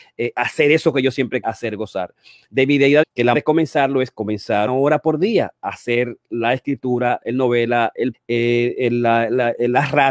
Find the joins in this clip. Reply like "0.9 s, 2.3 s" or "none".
1.4 s, 3.0 s, 3.3 s, 4.7 s, 8.1 s